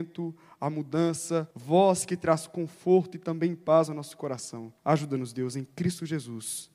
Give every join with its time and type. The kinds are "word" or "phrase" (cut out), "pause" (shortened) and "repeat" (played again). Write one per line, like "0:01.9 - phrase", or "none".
0:01.5 - pause
0:04.8 - pause